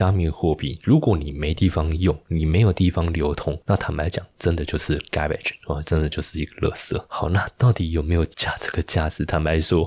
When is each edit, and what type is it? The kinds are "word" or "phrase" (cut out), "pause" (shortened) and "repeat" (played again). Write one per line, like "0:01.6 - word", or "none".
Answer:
none